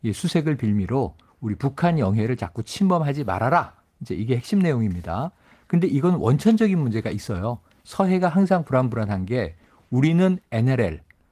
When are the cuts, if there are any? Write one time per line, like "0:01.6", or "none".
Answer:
none